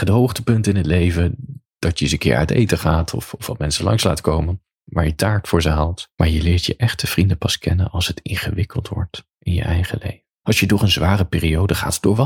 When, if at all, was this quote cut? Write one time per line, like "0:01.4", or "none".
0:01.7
0:06.1
0:10.3

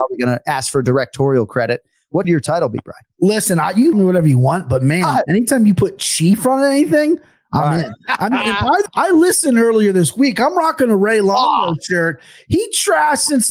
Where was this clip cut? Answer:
0:02.2
0:03.9
0:06.4
0:08.9

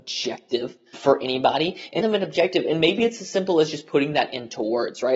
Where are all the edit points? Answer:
0:00.9
0:02.0

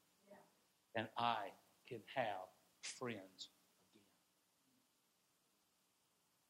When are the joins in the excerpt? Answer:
none

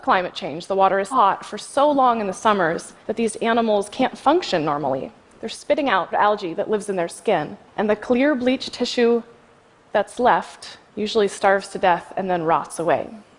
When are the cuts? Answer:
0:01.1
0:03.0
0:05.2
0:06.1
0:07.7
0:10.9

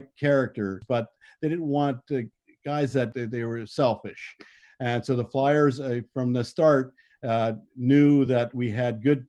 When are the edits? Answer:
none

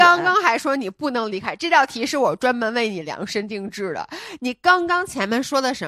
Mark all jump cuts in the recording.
none

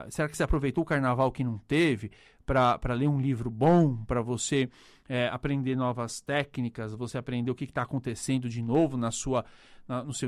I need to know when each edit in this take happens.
none

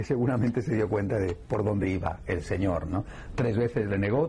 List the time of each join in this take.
none

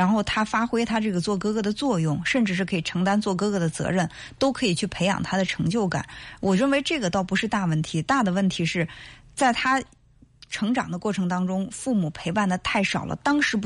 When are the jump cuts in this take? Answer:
none

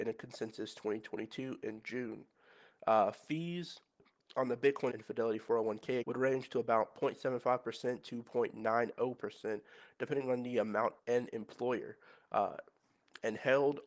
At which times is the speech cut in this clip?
0:04.9
0:06.0
0:11.0

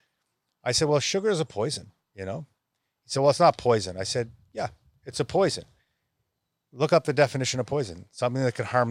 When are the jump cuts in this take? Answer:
none

